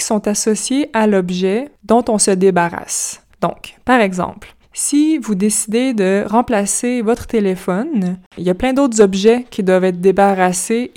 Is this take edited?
yes; 3 cuts; at 3.3 s, 4.6 s, 8.3 s

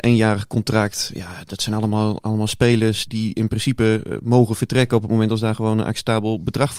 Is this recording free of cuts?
no; 1 cut; at 3.1 s

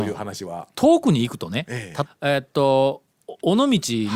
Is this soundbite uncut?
no; 1 cut; at 2.0 s

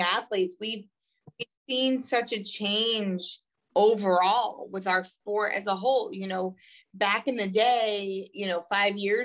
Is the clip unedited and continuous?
yes; 0 cuts

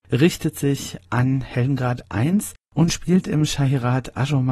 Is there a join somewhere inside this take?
no; 0 cuts

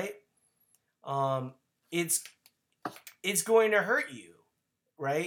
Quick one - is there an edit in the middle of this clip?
no; 0 cuts

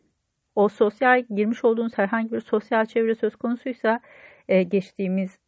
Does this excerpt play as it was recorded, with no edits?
yes; 0 cuts

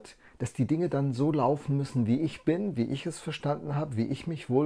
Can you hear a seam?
no; 0 cuts

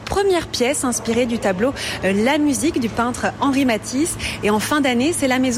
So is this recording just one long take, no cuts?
yes; 0 cuts

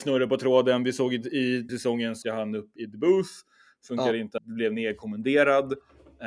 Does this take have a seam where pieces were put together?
yes; 4 cuts; at 1.7 s, 2.2 s, 2.8 s, 4.4 s

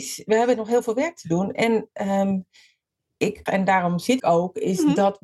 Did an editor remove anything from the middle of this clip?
yes; 2 cuts; at 3.5 s, 4.2 s

